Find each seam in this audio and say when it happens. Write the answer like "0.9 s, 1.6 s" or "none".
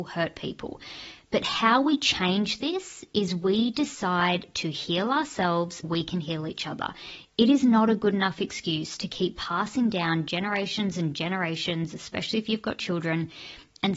5.8 s